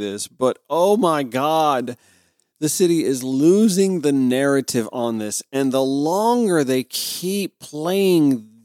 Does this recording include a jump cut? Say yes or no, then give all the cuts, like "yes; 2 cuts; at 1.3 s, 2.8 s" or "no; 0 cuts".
no; 0 cuts